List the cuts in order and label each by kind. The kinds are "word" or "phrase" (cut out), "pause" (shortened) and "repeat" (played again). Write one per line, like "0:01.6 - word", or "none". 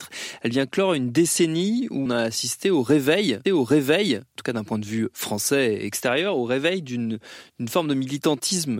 0:02.1 - word
0:03.4 - repeat